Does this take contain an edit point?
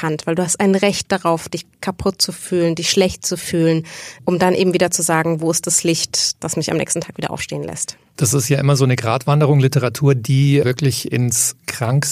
no; 0 cuts

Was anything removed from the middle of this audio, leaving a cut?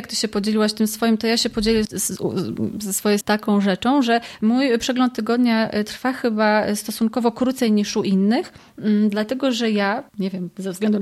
yes; 3 cuts; at 1.8 s, 3.2 s, 10.1 s

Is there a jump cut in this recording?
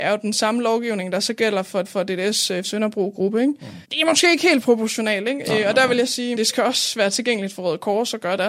yes; 4 cuts; at 1.8 s, 2.6 s, 3.8 s, 6.3 s

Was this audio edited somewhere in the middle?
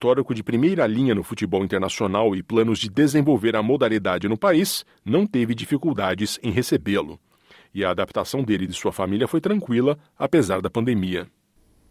no; 0 cuts

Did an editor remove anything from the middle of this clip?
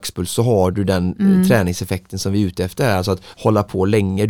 yes; 1 cut; at 3.3 s

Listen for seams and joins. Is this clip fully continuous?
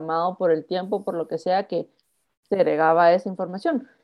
yes; 0 cuts

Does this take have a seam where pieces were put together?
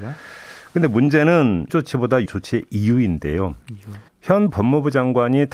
yes; 3 cuts; at 1.7 s, 2.3 s, 4.1 s

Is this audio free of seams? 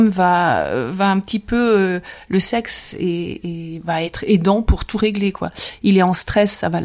yes; 0 cuts

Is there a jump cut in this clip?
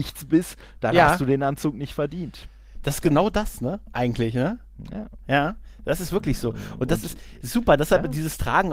no; 0 cuts

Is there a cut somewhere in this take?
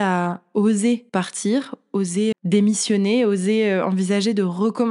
yes; 2 cuts; at 1.1 s, 2.3 s

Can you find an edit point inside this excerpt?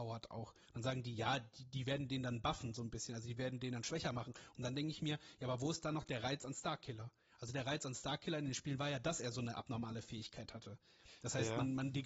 no; 0 cuts

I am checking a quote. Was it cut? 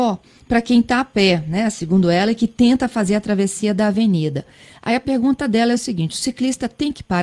no; 0 cuts

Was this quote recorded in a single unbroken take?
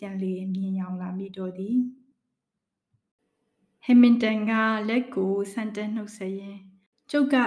yes; 0 cuts

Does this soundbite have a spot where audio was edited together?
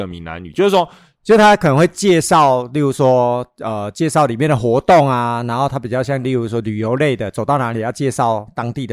no; 0 cuts

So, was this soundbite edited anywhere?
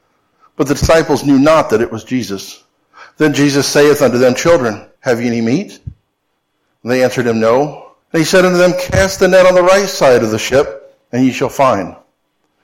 yes; 3 cuts; at 2.9 s, 5.0 s, 8.0 s

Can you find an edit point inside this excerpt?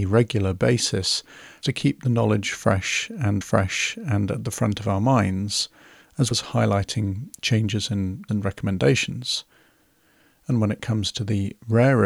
yes; 4 cuts; at 1.6 s, 3.4 s, 6.3 s, 8.3 s

